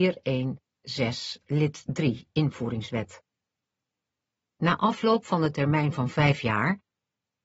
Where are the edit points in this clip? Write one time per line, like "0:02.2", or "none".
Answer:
none

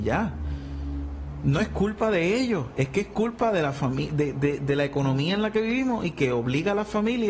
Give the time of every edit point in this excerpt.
none

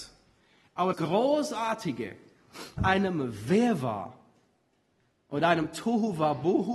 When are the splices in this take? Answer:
0:00.9
0:02.8

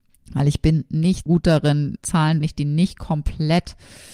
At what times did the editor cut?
0:01.3
0:02.0
0:02.4

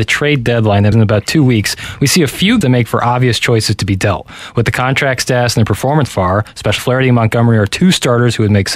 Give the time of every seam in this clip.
0:00.9
0:02.6
0:06.1
0:06.8

